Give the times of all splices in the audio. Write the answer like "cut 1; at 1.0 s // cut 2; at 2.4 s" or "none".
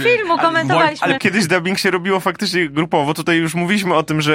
cut 1; at 1.2 s